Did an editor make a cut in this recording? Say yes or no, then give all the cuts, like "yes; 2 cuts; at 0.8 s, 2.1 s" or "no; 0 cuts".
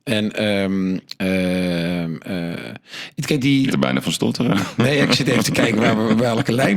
yes; 2 cuts; at 3.4 s, 3.7 s